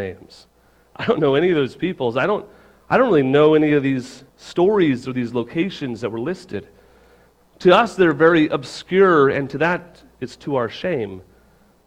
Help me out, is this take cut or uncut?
cut